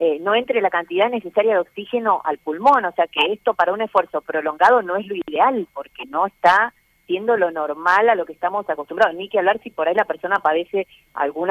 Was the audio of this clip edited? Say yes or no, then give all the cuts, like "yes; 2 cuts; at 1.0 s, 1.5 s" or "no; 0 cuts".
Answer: no; 0 cuts